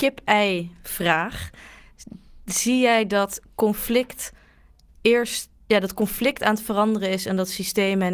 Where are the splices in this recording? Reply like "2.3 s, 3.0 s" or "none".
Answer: none